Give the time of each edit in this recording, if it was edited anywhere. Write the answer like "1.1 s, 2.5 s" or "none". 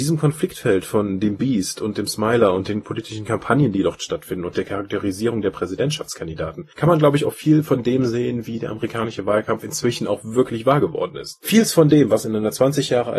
none

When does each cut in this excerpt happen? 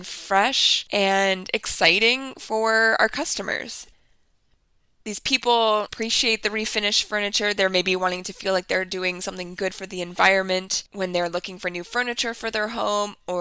none

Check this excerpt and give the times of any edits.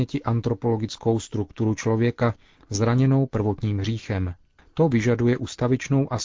none

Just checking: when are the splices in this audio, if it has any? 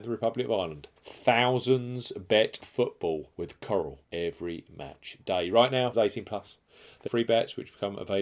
1.0 s, 2.6 s, 3.3 s, 4.0 s, 5.9 s, 7.1 s

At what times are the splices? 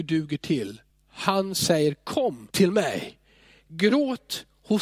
0.9 s, 2.5 s

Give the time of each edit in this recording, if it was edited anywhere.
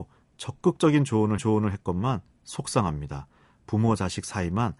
1.4 s

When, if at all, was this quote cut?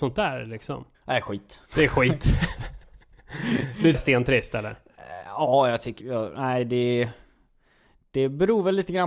0.9 s, 1.6 s, 3.9 s, 6.0 s

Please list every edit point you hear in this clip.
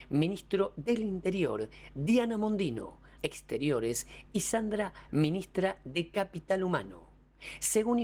3.2 s, 5.1 s

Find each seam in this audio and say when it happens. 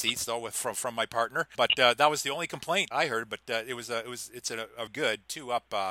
1.5 s, 2.9 s, 4.9 s

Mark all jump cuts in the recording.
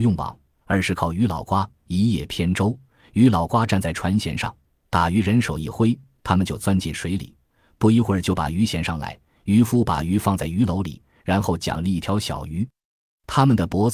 none

